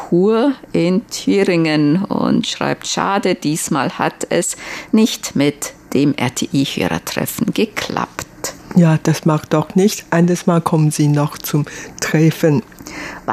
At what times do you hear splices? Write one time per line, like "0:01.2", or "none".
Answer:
none